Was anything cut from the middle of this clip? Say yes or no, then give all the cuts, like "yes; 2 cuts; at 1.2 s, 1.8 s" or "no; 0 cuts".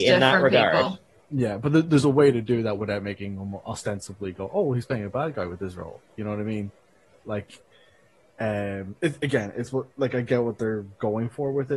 no; 0 cuts